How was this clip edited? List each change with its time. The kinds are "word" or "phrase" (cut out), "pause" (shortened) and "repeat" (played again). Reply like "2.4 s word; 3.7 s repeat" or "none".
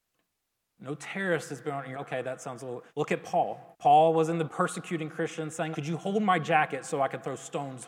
1.9 s word; 2.9 s pause; 3.7 s pause; 4.5 s word; 5.7 s word